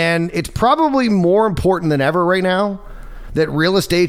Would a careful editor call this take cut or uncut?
uncut